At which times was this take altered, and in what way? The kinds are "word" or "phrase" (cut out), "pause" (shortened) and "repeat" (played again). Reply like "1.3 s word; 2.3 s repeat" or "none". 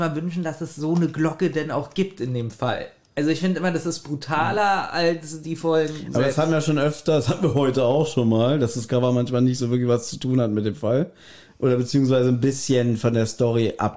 none